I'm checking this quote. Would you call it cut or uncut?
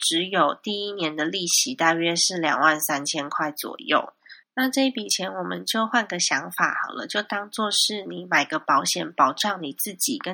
cut